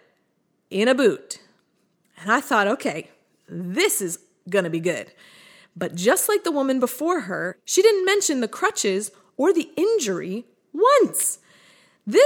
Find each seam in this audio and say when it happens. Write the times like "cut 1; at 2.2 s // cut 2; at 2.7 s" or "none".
none